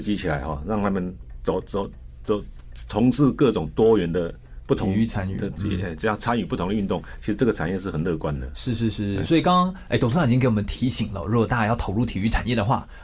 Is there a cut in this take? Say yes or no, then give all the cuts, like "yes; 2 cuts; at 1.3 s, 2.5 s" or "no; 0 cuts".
yes; 1 cut; at 9.3 s